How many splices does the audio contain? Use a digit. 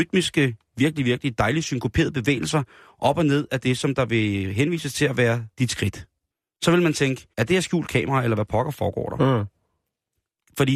3